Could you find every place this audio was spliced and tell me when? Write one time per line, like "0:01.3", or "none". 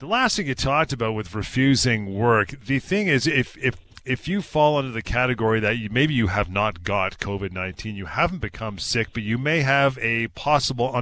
none